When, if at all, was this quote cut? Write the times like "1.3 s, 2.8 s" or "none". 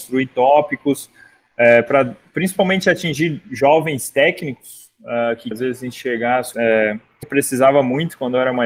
5.5 s, 6.5 s, 7.2 s